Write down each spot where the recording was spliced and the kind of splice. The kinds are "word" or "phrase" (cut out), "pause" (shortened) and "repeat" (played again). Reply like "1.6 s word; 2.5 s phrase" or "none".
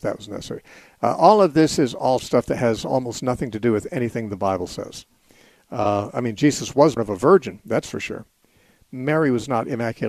2.2 s word; 7.0 s word